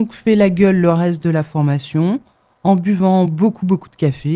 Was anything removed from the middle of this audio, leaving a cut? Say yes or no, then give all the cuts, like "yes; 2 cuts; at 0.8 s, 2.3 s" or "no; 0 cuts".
no; 0 cuts